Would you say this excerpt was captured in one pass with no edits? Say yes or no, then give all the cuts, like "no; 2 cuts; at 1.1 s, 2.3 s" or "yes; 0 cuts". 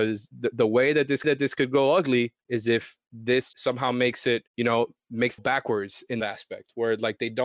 no; 6 cuts; at 1.2 s, 2.4 s, 3.5 s, 4.5 s, 5.4 s, 6.2 s